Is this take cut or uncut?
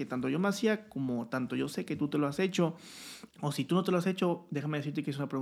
cut